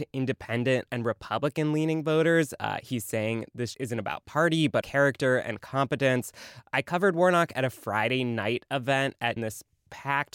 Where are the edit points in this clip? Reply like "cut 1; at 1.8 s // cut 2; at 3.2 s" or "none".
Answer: cut 1; at 3.7 s // cut 2; at 4.8 s // cut 3; at 9.4 s